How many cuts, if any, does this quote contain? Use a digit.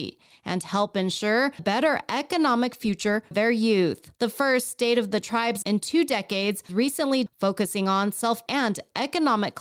7